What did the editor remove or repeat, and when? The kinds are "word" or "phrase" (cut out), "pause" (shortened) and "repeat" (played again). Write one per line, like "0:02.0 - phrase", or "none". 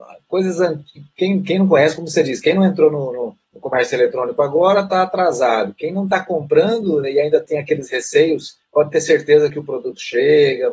0:03.4 - pause
0:08.6 - pause